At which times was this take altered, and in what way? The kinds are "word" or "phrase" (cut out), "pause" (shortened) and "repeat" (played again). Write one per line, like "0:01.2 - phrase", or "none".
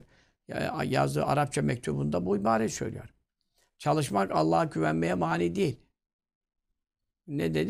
none